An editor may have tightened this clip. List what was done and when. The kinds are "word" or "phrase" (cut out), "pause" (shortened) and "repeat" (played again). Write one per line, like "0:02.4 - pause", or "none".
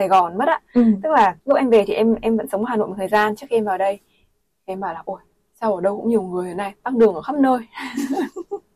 0:01.4 - pause